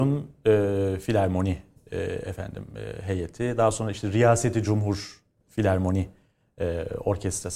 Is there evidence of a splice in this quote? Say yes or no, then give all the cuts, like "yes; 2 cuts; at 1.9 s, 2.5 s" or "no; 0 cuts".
no; 0 cuts